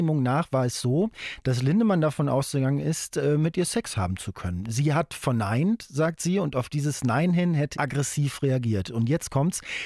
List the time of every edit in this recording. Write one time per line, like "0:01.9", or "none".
0:07.7